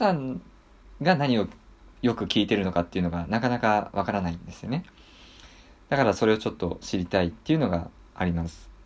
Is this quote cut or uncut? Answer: uncut